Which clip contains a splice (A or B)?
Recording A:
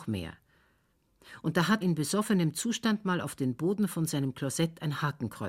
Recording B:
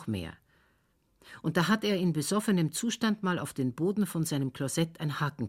A